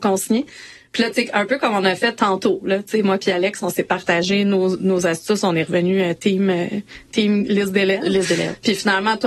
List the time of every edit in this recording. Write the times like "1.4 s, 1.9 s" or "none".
none